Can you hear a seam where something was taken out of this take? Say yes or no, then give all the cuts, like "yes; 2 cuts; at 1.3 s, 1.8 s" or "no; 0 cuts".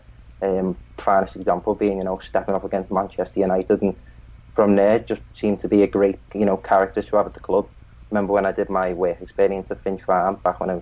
yes; 1 cut; at 6.2 s